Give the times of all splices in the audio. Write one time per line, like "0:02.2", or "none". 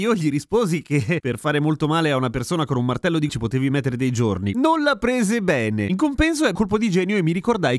0:03.3
0:06.5

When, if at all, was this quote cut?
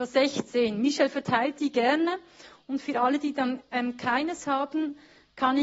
none

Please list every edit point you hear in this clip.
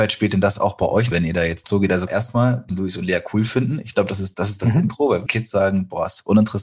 0:01.1
0:01.6
0:02.1
0:02.7
0:04.3
0:05.3

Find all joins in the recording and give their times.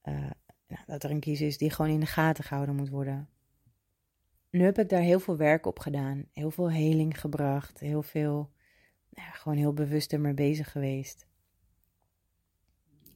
0:03.7

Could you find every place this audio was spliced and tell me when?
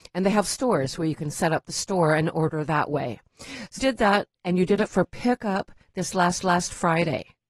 0:03.8
0:06.4

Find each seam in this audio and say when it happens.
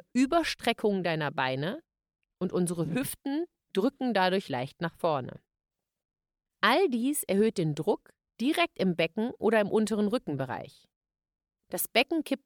none

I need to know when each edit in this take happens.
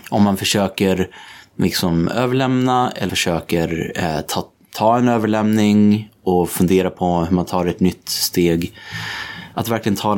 0:03.1

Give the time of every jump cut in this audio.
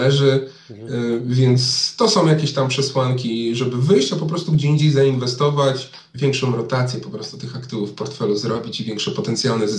none

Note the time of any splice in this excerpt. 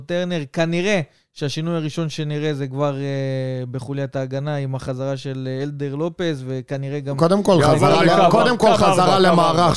none

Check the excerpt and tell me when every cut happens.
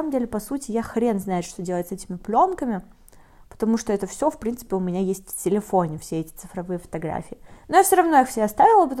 none

